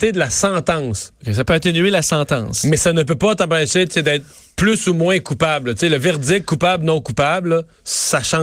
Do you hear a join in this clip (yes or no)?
no